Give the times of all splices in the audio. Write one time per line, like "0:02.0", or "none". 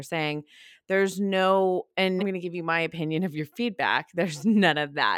0:02.2

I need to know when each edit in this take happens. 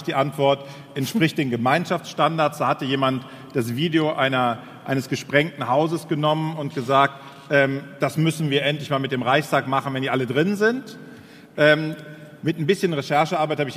none

